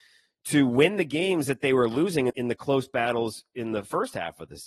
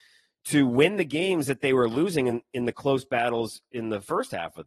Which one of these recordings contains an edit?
first; 1 cut; at 2.3 s

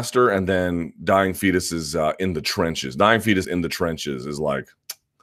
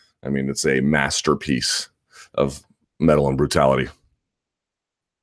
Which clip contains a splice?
first; 1 cut; at 3.4 s

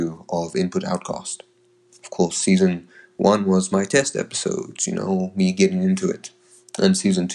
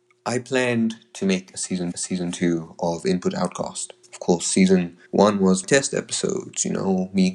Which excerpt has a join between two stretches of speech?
second; 4 cuts; at 1.9 s, 4.0 s, 5.1 s, 5.6 s

